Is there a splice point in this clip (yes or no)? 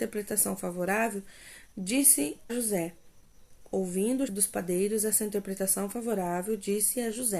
yes